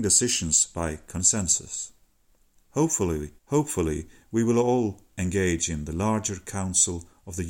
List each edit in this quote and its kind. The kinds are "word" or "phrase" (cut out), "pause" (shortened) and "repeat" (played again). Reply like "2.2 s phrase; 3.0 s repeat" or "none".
3.4 s pause